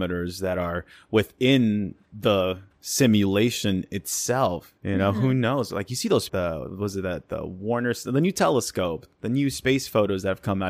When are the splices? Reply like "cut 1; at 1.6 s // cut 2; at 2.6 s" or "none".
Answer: cut 1; at 4.8 s // cut 2; at 6.3 s